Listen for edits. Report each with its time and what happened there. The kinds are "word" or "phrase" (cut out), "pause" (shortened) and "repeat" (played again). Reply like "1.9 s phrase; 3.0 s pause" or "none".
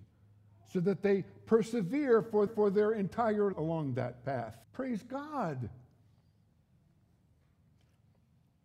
2.5 s repeat; 3.5 s word; 4.6 s pause